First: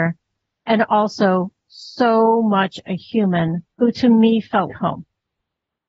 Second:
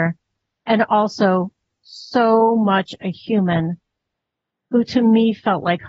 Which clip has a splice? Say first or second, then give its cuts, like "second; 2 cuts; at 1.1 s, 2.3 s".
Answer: first; 3 cuts; at 1.6 s, 3.7 s, 4.7 s